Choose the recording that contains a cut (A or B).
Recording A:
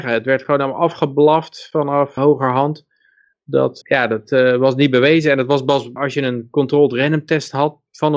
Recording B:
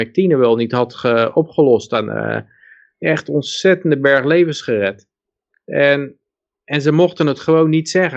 A